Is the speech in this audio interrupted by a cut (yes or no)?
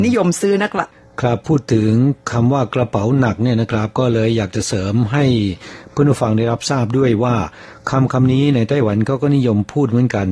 no